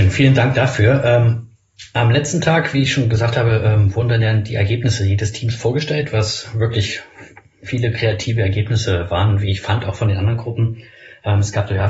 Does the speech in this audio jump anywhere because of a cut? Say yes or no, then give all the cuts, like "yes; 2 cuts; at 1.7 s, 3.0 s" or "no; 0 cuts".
no; 0 cuts